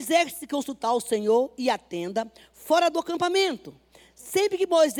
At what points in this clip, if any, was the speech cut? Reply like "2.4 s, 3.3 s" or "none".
none